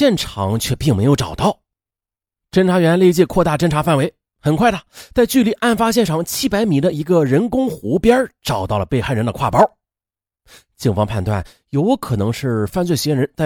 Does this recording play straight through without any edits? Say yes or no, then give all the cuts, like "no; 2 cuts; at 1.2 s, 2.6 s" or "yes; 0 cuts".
yes; 0 cuts